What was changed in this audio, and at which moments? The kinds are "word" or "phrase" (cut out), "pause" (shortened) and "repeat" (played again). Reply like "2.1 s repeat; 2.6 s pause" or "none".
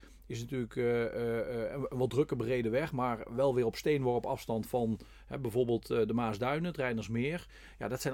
none